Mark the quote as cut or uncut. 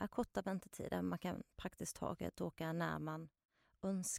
uncut